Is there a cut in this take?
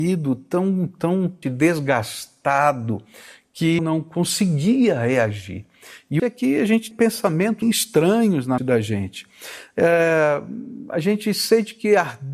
yes; 6 cuts; at 1.4 s, 3.8 s, 6.2 s, 6.9 s, 7.6 s, 8.6 s

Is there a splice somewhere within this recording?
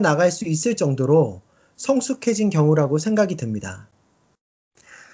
no; 0 cuts

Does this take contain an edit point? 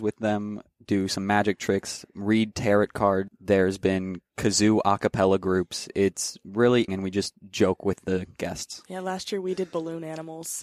yes; 2 cuts; at 3.3 s, 6.9 s

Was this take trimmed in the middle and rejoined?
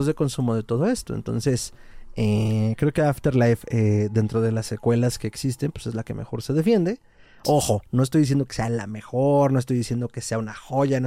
no; 0 cuts

